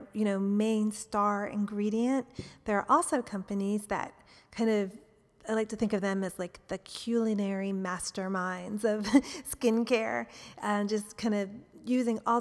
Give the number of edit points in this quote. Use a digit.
0